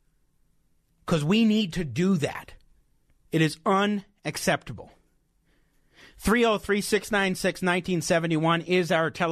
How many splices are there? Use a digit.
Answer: 0